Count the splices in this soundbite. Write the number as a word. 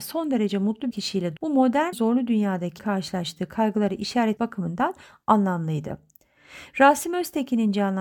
five